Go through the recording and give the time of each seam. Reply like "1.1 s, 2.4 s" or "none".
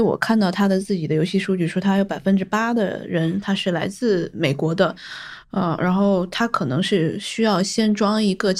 none